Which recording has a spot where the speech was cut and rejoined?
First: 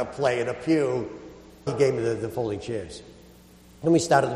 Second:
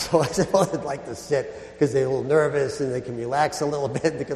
first; 1 cut; at 1.7 s

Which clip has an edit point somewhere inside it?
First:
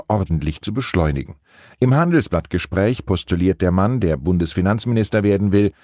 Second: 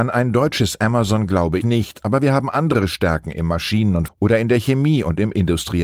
second; 2 cuts; at 1.6 s, 4.1 s

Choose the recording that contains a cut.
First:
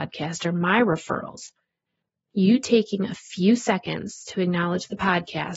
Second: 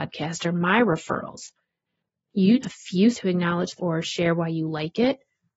second; 3 cuts; at 2.6 s, 3.1 s, 3.8 s

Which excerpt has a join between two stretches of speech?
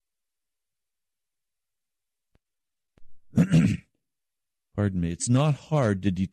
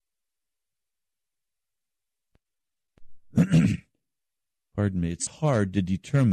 second; 1 cut; at 5.3 s

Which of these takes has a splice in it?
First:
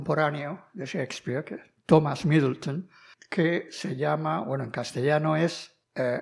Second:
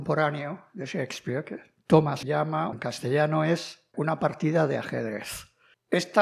second; 3 cuts; at 2.2 s, 2.7 s, 3.9 s

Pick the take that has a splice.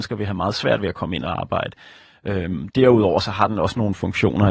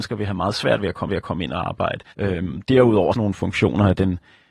second; 3 cuts; at 1.1 s, 2.1 s, 3.1 s

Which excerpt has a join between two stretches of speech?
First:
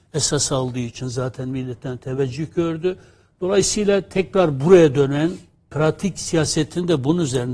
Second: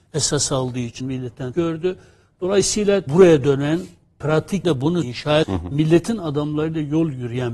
second; 6 cuts; at 1.0 s, 1.5 s, 3.1 s, 4.6 s, 5.0 s, 5.4 s

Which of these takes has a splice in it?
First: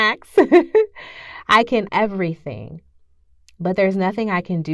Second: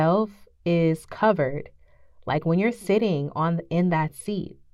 first; 1 cut; at 1.9 s

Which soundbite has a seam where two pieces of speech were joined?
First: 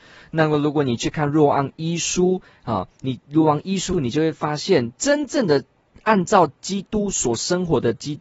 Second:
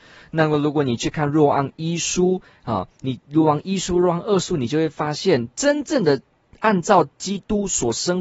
first; 1 cut; at 3.9 s

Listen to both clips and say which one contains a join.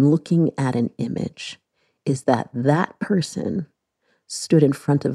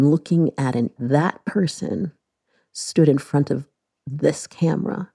second; 1 cut; at 1.0 s

